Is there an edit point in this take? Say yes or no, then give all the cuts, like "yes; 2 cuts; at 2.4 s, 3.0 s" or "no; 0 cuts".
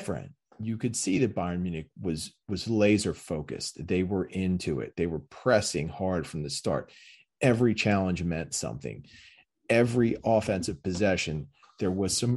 no; 0 cuts